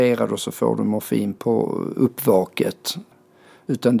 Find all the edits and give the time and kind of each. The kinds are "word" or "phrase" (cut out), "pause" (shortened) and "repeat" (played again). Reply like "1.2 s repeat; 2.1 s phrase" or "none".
none

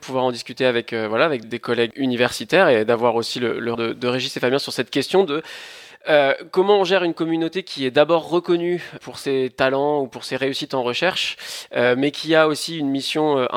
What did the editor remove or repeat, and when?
1.4 s word; 1.9 s word; 3.7 s word; 9.0 s word

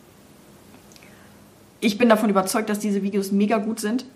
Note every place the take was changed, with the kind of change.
none

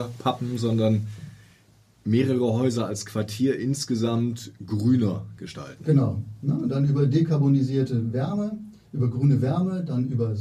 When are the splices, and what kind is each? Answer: none

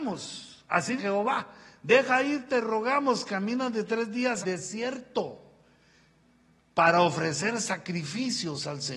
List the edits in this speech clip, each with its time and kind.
1.0 s word; 4.4 s word

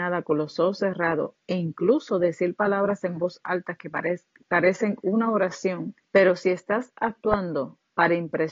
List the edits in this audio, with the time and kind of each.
4.4 s pause; 6.0 s pause

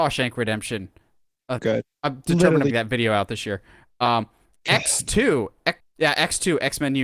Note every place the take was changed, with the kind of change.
1.6 s word; 2.7 s word; 5.8 s word

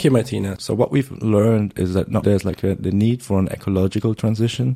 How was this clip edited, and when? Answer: 2.2 s word

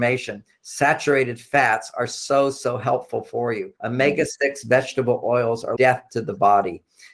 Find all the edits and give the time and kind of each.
3.8 s pause; 5.8 s word

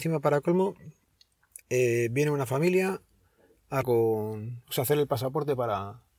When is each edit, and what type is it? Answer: 1.6 s pause; 3.8 s phrase

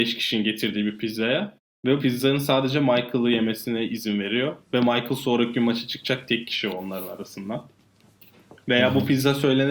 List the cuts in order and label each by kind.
2.0 s word

